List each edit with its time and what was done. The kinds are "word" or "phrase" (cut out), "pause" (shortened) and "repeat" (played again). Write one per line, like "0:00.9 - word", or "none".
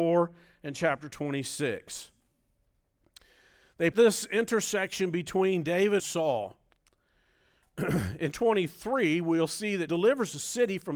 0:03.9 - word
0:06.0 - word
0:08.3 - word
0:09.9 - word